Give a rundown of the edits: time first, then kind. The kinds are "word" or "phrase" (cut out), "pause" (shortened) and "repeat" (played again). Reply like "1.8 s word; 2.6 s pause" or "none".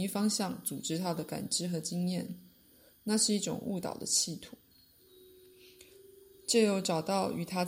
none